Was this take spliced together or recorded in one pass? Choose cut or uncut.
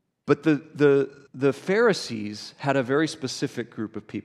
cut